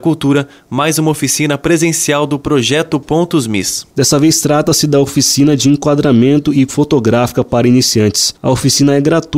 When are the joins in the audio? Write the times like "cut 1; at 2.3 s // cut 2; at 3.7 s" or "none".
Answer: cut 1; at 6.7 s